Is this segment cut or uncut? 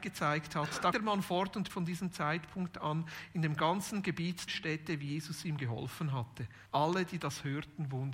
cut